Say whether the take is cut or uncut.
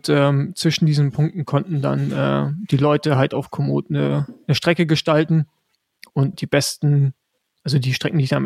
cut